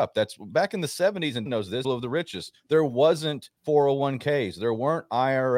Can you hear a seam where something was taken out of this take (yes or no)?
yes